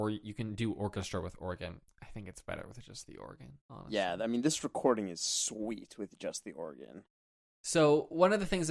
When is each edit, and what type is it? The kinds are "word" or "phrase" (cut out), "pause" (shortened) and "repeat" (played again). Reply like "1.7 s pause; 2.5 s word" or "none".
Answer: 3.6 s pause